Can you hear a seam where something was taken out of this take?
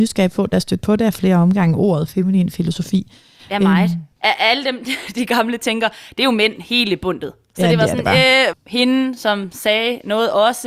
yes; 2 cuts; at 4.1 s, 8.5 s

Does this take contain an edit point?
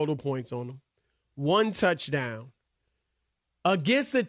no; 0 cuts

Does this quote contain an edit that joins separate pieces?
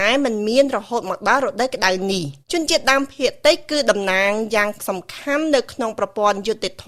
yes; 1 cut; at 2.4 s

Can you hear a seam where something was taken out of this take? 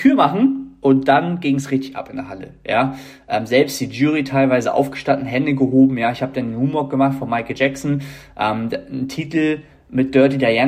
no; 0 cuts

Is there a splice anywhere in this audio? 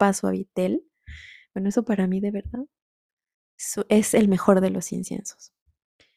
no; 0 cuts

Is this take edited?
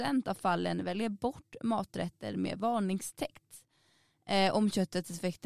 no; 0 cuts

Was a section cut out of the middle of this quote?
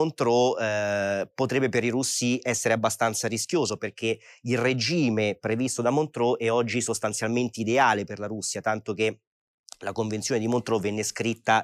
no; 0 cuts

